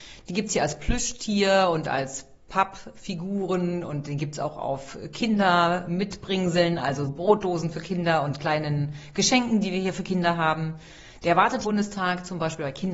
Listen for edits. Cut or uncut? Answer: cut